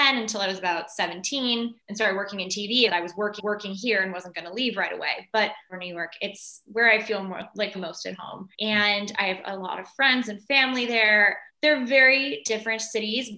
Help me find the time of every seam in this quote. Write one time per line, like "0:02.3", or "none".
0:01.8
0:02.9
0:03.4
0:05.7
0:07.7
0:08.5
0:11.5